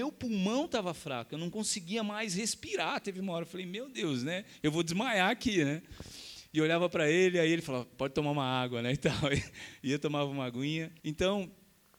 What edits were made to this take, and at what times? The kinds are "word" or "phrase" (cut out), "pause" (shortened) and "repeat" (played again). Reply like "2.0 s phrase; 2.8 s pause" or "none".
11.0 s pause